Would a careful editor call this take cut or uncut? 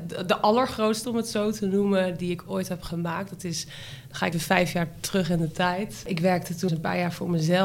cut